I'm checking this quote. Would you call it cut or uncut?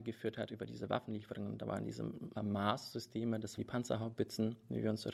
cut